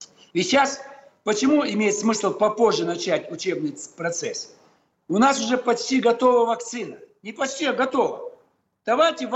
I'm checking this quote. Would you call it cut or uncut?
uncut